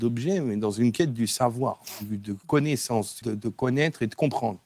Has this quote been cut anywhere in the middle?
yes; 1 cut; at 3.2 s

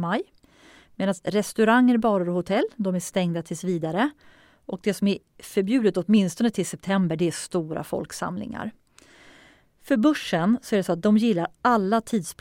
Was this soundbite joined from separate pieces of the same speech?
no; 0 cuts

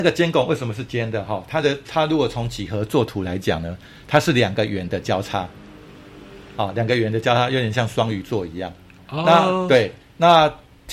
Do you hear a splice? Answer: no; 0 cuts

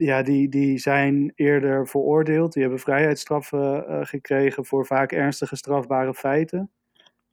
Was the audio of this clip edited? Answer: no; 0 cuts

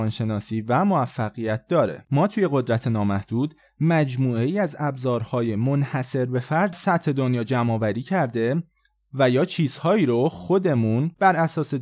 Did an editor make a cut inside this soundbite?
yes; 1 cut; at 6.7 s

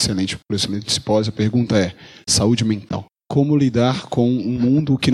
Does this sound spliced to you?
no; 0 cuts

